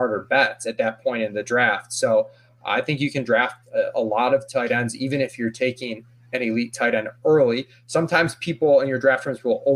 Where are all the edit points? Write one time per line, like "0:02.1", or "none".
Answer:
none